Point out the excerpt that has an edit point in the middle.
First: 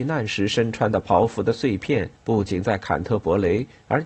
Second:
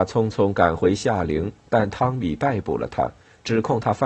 first; 1 cut; at 2.2 s

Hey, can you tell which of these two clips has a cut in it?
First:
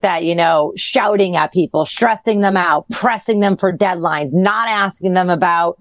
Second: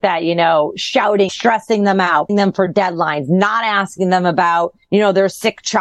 second; 2 cuts; at 1.3 s, 2.3 s

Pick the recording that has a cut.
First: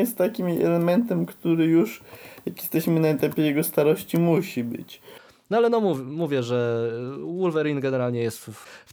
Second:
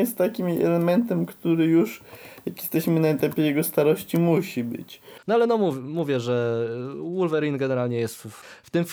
second; 1 cut; at 5.2 s

